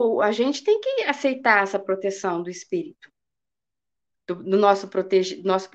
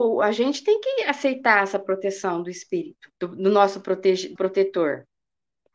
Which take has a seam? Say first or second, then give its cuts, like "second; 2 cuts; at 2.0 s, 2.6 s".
second; 2 cuts; at 3.2 s, 4.4 s